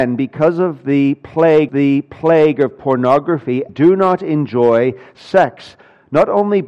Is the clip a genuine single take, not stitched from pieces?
no; 2 cuts; at 1.7 s, 3.7 s

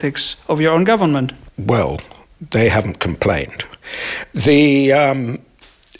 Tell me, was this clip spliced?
yes; 1 cut; at 1.5 s

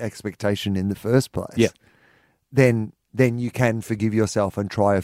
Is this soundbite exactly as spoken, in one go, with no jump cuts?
yes; 0 cuts

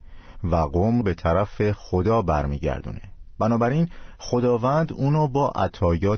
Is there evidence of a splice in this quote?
yes; 1 cut; at 1.0 s

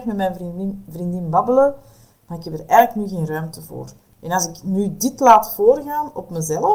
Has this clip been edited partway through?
no; 0 cuts

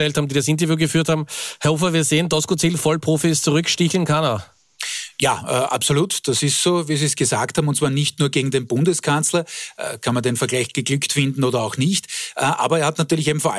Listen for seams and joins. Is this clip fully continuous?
yes; 0 cuts

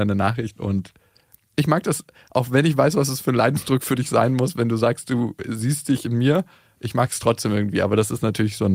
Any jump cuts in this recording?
no; 0 cuts

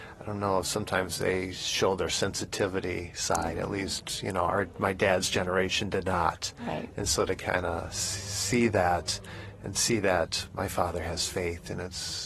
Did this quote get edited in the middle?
no; 0 cuts

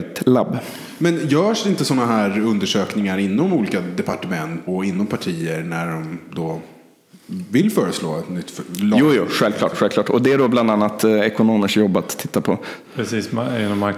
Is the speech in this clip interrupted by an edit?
yes; 2 cuts; at 4.7 s, 12.8 s

